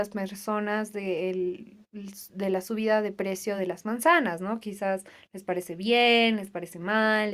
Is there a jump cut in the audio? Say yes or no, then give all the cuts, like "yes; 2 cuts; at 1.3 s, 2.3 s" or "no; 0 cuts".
no; 0 cuts